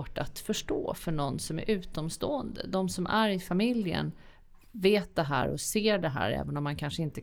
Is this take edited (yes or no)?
no